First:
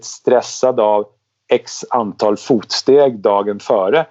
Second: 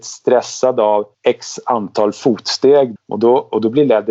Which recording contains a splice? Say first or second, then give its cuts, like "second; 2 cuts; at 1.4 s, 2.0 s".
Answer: second; 2 cuts; at 1.1 s, 3.0 s